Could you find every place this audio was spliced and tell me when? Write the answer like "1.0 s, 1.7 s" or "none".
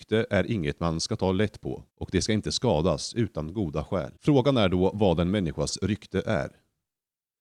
1.9 s, 4.2 s